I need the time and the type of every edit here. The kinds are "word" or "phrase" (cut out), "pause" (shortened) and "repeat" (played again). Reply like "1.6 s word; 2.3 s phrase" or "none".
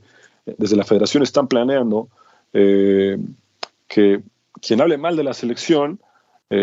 none